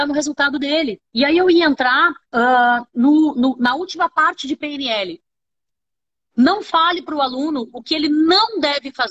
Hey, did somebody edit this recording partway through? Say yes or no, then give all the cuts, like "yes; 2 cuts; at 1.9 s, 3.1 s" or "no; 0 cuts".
yes; 2 cuts; at 1.1 s, 2.2 s